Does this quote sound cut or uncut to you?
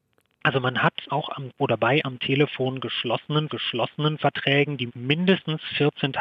cut